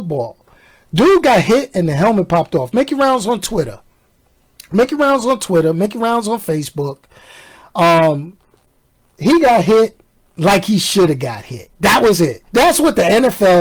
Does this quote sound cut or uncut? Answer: cut